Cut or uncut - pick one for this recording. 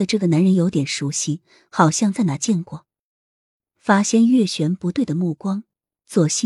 uncut